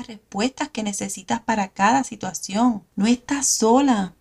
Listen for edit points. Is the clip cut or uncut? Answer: uncut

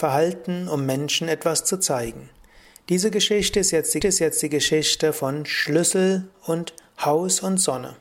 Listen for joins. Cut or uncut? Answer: cut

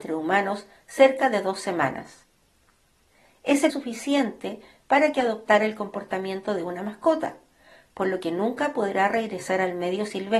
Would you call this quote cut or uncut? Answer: cut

